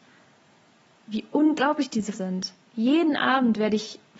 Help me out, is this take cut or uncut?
cut